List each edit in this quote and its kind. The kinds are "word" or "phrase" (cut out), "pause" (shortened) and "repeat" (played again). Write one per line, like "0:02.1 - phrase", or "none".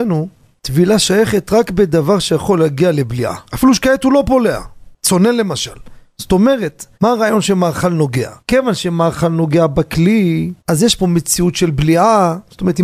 0:03.5 - pause
0:06.9 - pause
0:08.4 - pause
0:10.6 - pause